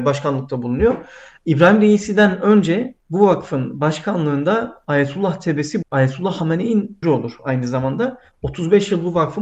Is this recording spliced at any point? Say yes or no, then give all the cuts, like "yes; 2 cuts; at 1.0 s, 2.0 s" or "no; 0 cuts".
yes; 3 cuts; at 3.0 s, 5.8 s, 7.0 s